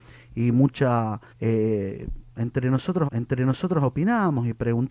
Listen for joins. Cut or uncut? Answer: cut